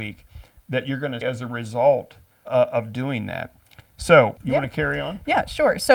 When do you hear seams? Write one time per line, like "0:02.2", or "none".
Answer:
0:01.2
0:02.4
0:04.4